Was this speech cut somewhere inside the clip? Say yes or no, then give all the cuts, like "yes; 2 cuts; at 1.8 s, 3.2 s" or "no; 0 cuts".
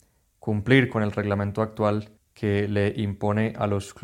yes; 1 cut; at 2.2 s